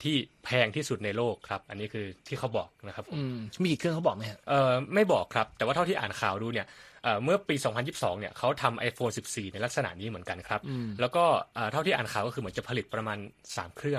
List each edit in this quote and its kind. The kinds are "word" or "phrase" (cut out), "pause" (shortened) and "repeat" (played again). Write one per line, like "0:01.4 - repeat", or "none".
0:04.4 - pause